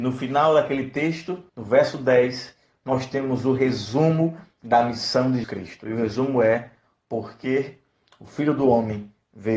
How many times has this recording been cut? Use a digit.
2